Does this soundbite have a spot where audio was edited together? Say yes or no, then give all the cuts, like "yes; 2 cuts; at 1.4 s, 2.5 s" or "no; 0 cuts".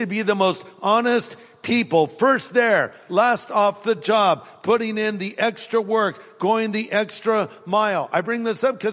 no; 0 cuts